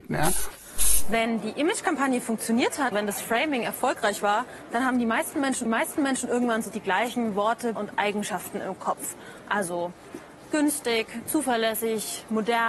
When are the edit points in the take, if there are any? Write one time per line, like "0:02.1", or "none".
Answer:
0:02.9
0:05.7
0:06.7
0:07.8

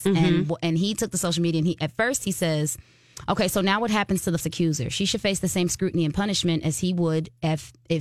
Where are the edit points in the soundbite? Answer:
0:04.4

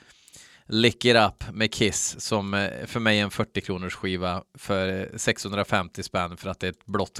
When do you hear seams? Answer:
none

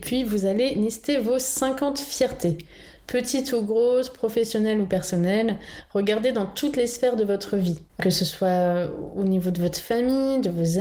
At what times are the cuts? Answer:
0:07.9

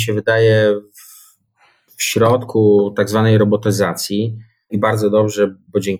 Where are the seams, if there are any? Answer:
none

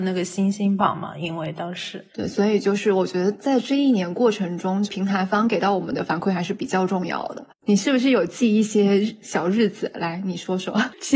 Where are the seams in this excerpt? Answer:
0:02.1

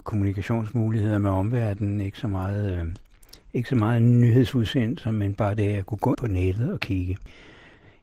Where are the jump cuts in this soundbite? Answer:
0:06.1

